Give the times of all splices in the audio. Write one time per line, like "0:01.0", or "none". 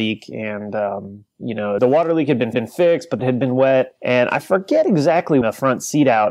0:01.3
0:01.8
0:02.5
0:03.2
0:04.0
0:05.4